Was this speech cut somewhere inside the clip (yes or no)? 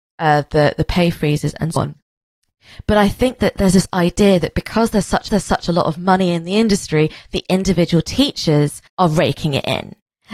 yes